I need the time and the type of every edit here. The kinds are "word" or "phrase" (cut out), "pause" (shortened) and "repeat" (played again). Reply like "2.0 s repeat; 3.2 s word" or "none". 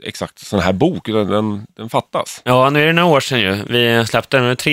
none